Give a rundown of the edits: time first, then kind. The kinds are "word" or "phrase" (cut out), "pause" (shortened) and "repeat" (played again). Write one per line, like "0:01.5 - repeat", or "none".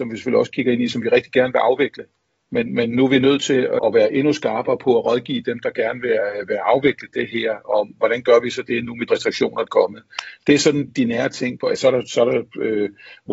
0:03.8 - word
0:09.1 - word
0:09.7 - word
0:10.9 - word